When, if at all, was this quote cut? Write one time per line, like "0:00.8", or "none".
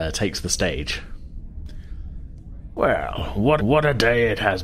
0:03.6